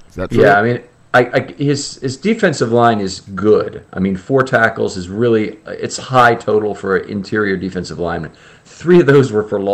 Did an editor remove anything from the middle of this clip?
no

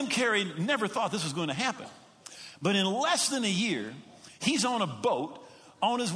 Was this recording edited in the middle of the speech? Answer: no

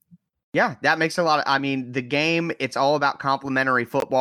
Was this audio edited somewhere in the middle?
no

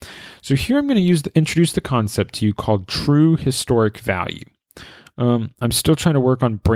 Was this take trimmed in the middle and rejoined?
no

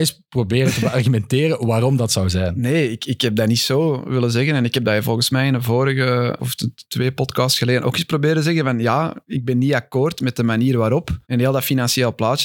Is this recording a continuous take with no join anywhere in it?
no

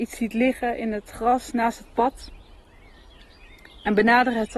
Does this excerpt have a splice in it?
no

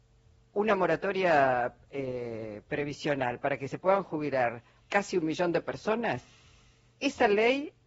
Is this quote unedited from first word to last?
no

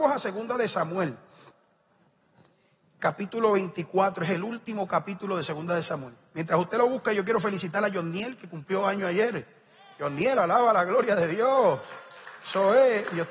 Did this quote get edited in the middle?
no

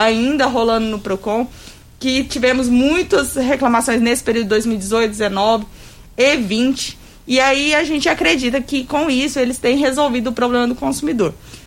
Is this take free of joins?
yes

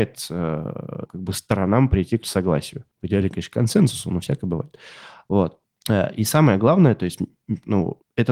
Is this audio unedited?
no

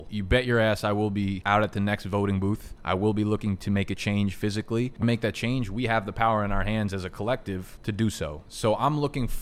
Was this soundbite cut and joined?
yes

